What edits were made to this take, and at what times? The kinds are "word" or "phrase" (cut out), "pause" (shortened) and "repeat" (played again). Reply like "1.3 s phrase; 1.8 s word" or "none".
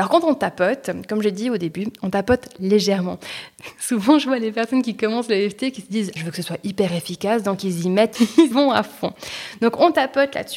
6.2 s word; 8.1 s word; 8.5 s word